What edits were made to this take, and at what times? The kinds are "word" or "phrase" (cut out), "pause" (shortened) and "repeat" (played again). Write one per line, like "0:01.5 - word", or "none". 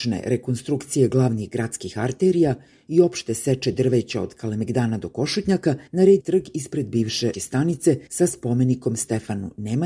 0:05.9 - pause
0:06.2 - phrase
0:07.3 - word
0:08.1 - pause